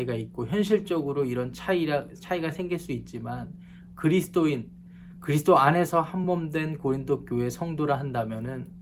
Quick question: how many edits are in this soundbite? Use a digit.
0